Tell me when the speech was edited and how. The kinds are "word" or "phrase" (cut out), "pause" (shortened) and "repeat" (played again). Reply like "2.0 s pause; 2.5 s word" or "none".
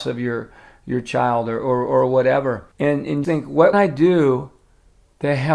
2.7 s pause; 3.2 s word; 3.7 s phrase

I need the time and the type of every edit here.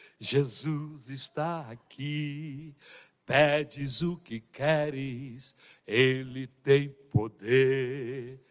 none

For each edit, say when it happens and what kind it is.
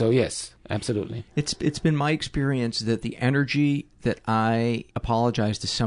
4.9 s pause

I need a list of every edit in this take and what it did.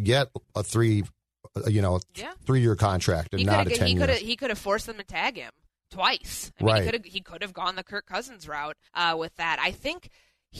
8.9 s pause

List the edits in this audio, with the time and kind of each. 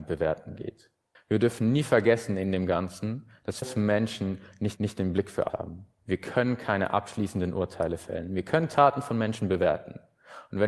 1.1 s pause; 3.6 s word; 4.8 s repeat; 5.5 s word

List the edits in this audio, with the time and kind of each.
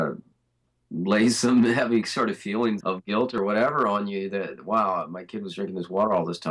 2.8 s word

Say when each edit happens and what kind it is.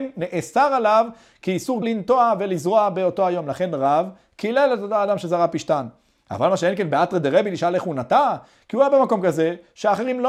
1.8 s word

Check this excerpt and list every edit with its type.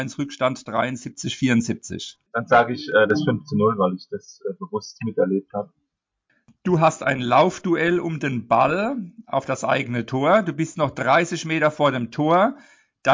2.3 s pause

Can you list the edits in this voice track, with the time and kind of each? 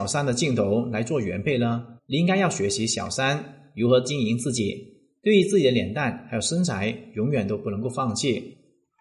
2.0 s pause

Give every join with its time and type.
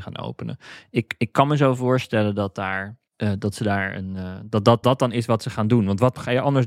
3.1 s pause; 4.8 s word

